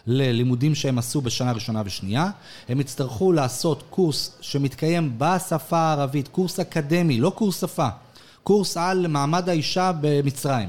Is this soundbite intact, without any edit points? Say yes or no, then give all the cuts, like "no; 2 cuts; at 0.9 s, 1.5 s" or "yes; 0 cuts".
yes; 0 cuts